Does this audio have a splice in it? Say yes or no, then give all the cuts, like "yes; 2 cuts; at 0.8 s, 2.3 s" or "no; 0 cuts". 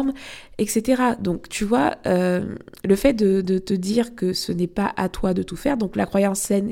no; 0 cuts